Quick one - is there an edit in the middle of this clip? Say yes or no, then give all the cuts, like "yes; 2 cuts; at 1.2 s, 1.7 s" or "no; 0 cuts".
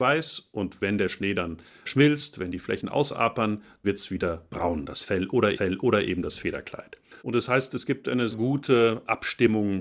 yes; 4 cuts; at 3.8 s, 5.5 s, 7.2 s, 8.3 s